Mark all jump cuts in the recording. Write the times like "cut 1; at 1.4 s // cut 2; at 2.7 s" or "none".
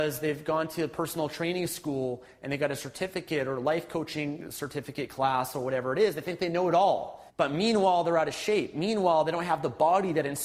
cut 1; at 7.3 s